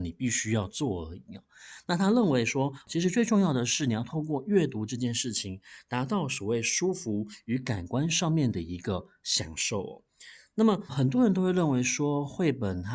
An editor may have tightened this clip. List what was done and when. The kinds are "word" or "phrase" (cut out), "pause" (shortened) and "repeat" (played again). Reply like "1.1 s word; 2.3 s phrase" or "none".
10.9 s word